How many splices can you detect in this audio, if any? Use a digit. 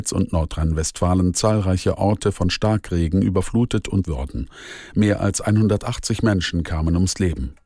1